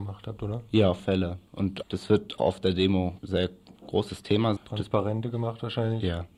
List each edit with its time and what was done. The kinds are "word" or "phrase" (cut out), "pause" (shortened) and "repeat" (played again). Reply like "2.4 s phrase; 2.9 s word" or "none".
1.0 s word; 1.8 s word; 2.4 s word; 3.2 s word; 3.8 s word; 4.6 s word